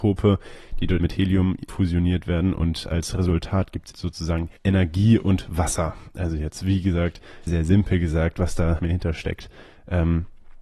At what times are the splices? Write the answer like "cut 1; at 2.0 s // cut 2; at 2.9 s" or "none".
cut 1; at 1.0 s // cut 2; at 1.7 s // cut 3; at 3.9 s // cut 4; at 4.6 s // cut 5; at 7.5 s // cut 6; at 8.8 s